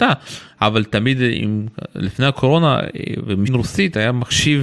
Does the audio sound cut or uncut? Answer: cut